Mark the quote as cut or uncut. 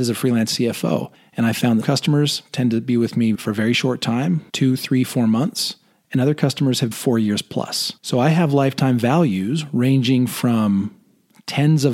cut